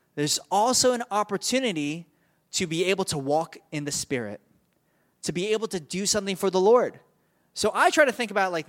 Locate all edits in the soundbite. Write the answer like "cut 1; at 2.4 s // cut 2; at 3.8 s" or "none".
none